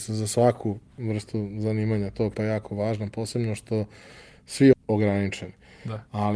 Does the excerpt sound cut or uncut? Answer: cut